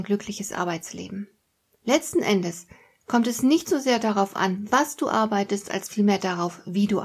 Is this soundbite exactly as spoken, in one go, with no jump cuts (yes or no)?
yes